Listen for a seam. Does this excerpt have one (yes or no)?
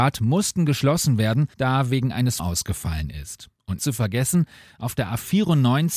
yes